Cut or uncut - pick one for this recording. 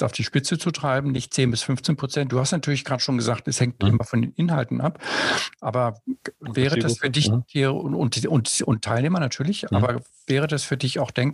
uncut